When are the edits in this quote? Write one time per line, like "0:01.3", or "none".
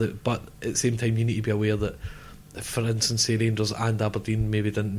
none